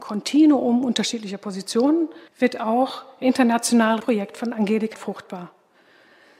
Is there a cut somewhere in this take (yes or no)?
yes